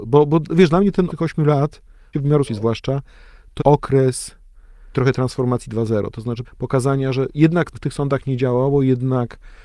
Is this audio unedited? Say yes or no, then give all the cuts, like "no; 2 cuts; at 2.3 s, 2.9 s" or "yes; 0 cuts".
no; 7 cuts; at 1.1 s, 2.1 s, 2.5 s, 3.6 s, 4.9 s, 6.4 s, 7.7 s